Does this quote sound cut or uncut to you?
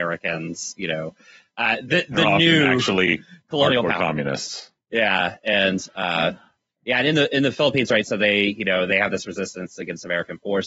uncut